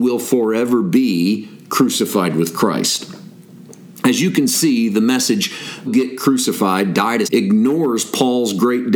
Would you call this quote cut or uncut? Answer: cut